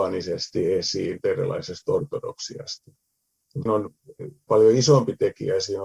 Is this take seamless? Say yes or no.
no